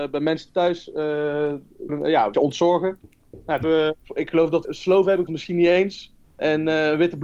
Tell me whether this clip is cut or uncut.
cut